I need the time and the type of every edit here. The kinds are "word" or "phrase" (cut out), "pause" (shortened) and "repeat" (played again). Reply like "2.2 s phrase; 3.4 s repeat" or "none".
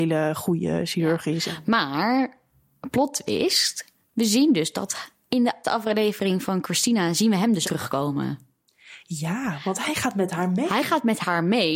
5.6 s word; 7.6 s word